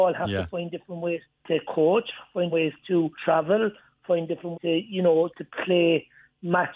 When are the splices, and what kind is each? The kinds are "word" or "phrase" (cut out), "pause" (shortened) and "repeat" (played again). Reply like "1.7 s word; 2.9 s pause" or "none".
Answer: 1.2 s word; 2.5 s word; 3.1 s pause; 4.5 s word

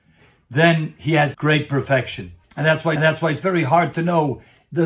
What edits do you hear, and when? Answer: 1.3 s word; 2.4 s pause; 3.0 s repeat

